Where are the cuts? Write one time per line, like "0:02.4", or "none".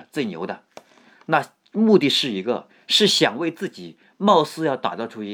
none